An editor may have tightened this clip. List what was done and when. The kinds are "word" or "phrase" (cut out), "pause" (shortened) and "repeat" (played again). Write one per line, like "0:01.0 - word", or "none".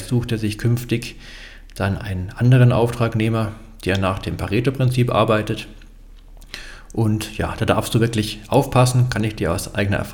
none